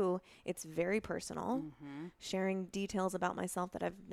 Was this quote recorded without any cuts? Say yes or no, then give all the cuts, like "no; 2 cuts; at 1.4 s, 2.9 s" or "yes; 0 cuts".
no; 1 cut; at 2.7 s